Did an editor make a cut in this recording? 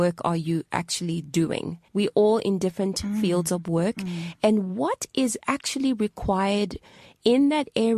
yes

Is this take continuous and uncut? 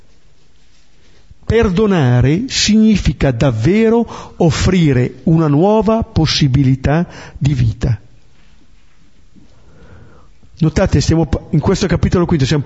yes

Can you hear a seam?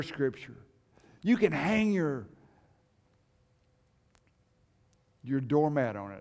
no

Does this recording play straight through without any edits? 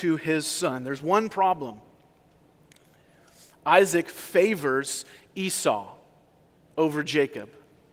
yes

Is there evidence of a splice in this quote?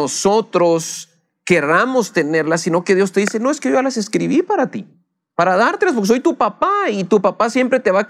no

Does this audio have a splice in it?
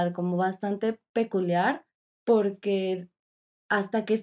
no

